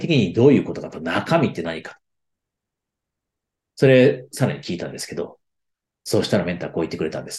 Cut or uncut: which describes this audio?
uncut